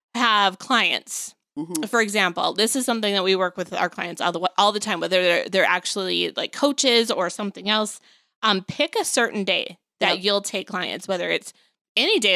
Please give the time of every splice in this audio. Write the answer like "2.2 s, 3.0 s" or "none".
none